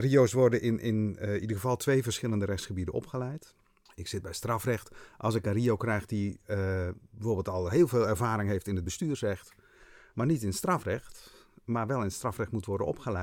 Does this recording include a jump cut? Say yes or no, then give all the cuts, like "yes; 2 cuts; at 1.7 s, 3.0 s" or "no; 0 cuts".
no; 0 cuts